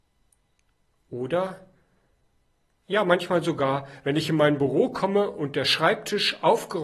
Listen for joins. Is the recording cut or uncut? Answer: uncut